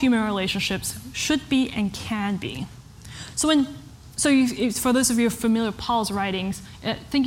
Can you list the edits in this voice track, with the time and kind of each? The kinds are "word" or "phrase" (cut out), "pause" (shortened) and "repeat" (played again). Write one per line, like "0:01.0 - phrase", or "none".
none

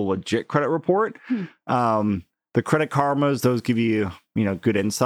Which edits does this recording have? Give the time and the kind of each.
none

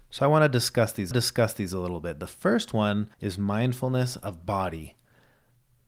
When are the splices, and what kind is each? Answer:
0:01.1 - repeat
0:03.1 - pause

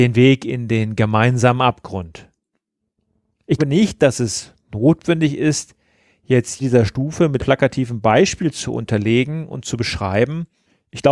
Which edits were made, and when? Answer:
0:03.6 - word
0:06.6 - word
0:07.4 - word

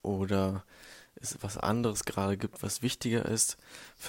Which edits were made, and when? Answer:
none

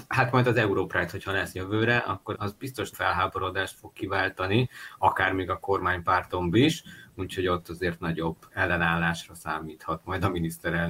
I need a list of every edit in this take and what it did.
0:02.3 - word
0:02.9 - word
0:06.5 - word

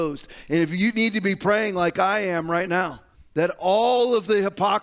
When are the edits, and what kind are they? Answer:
0:03.1 - pause

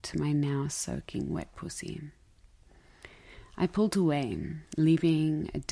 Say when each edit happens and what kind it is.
0:04.7 - pause

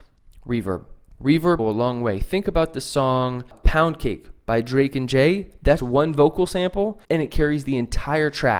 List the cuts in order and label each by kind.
0:01.6 - phrase
0:05.8 - word
0:07.0 - pause

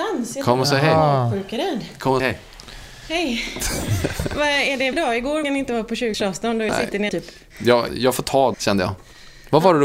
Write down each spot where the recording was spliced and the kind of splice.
0:02.2 - word
0:04.9 - word
0:05.4 - word
0:06.1 - word
0:06.7 - word
0:07.1 - word
0:07.9 - word
0:08.5 - word

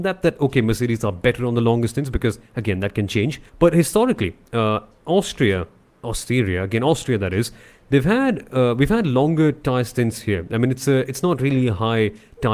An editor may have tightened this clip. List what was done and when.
0:03.5 - pause

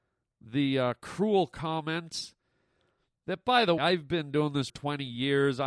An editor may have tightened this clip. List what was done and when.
0:03.8 - word
0:04.7 - word

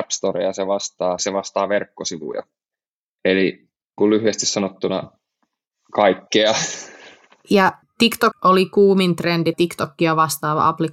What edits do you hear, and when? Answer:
0:01.2 - word
0:04.0 - word
0:07.8 - word
0:08.3 - word
0:09.5 - word

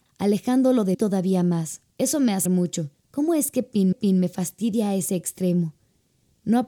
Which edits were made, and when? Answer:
0:00.9 - word
0:01.9 - pause
0:02.4 - word
0:03.9 - repeat

